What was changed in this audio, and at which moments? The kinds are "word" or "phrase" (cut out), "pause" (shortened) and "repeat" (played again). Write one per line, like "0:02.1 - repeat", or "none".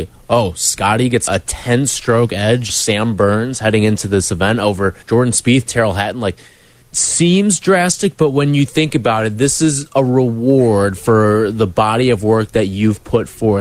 0:01.3 - word
0:02.7 - word
0:05.0 - pause
0:06.8 - word

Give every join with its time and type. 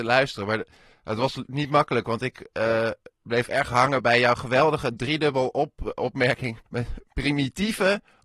0:03.1 - pause
0:06.7 - pause

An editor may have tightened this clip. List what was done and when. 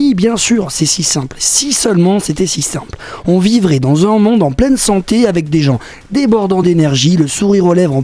none

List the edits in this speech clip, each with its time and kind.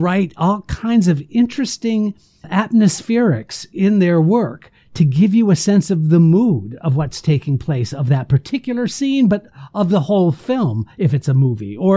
0:02.4 - word

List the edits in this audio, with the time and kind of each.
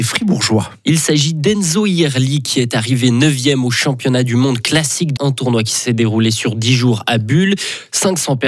0:05.2 - word

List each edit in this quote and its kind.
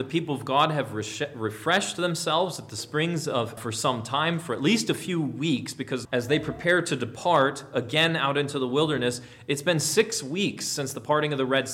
0:03.6 - phrase
0:06.0 - word

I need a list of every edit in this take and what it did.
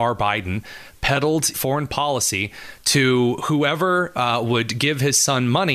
0:01.5 - phrase

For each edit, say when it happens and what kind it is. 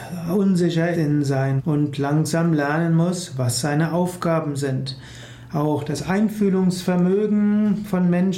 0:00.9 - word
0:01.6 - word

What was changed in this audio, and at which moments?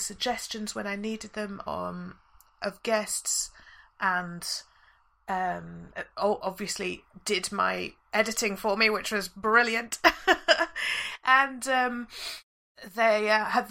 none

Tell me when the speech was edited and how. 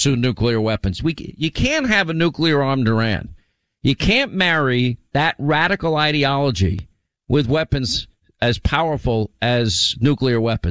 none

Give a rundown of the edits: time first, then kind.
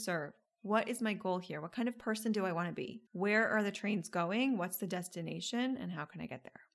0:03.1 - pause

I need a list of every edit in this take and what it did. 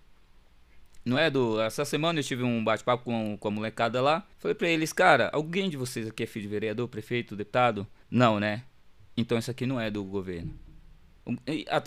0:04.3 - pause
0:08.0 - pause

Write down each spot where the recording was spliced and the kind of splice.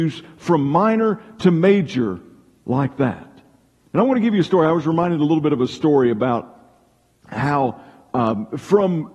none

